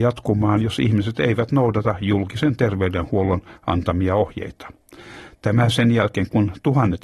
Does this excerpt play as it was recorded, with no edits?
yes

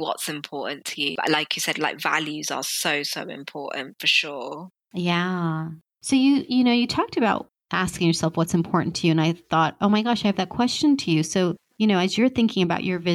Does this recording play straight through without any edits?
yes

